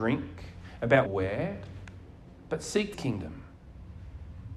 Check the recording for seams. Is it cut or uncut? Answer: cut